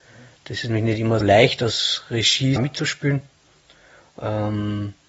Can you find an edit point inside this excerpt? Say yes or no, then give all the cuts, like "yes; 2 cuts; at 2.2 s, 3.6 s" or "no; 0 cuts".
yes; 2 cuts; at 1.2 s, 2.6 s